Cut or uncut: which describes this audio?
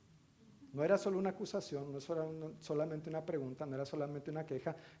uncut